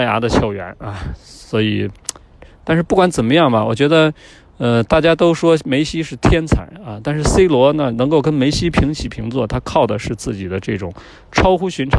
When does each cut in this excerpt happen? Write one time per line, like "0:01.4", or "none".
none